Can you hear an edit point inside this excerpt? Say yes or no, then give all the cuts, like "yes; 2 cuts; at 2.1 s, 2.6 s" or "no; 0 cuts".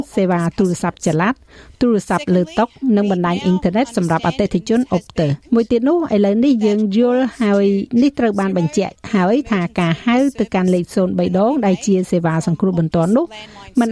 yes; 1 cut; at 5.4 s